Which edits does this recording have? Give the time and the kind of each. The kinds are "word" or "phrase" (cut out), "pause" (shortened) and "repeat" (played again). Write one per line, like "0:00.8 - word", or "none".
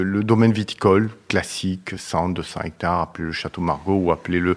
none